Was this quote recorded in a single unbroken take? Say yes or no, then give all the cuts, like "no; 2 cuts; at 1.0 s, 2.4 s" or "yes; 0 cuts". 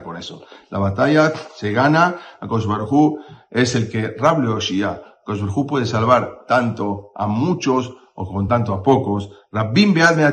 yes; 0 cuts